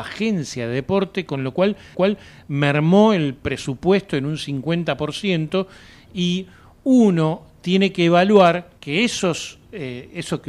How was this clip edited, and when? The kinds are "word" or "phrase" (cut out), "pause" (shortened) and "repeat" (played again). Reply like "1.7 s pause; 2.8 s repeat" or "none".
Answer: 1.9 s repeat; 8.8 s pause